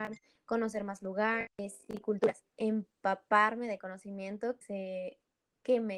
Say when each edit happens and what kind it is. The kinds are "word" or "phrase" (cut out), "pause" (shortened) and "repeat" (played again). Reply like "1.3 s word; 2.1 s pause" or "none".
2.5 s pause; 4.6 s word